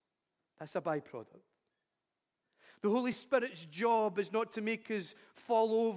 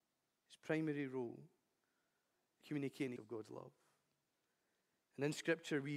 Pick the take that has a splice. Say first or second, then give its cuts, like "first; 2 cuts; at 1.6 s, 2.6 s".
second; 2 cuts; at 2.6 s, 3.2 s